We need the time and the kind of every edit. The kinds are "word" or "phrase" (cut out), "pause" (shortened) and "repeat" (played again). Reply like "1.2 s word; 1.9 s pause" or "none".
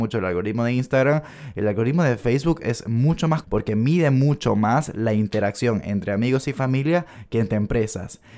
3.4 s word

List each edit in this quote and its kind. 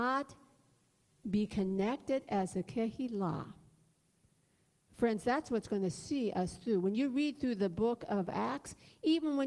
none

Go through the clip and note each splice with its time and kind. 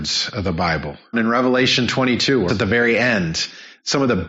1.1 s word; 2.5 s word

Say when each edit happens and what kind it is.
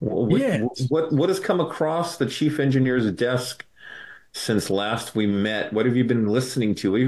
none

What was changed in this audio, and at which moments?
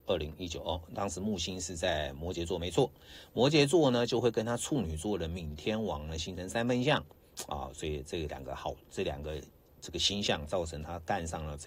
none

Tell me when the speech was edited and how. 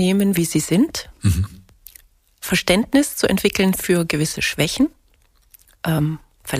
none

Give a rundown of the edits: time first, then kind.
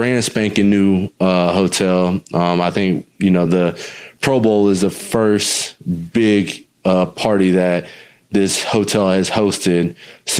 none

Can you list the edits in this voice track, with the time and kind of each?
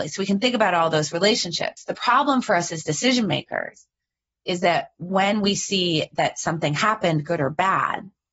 none

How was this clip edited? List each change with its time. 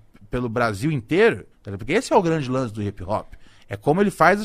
1.5 s pause

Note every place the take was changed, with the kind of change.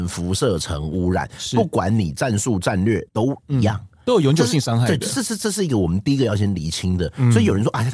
3.1 s pause

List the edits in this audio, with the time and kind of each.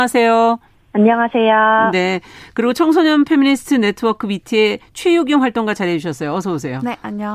none

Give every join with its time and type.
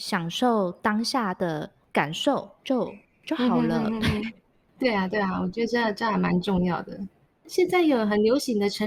2.6 s pause

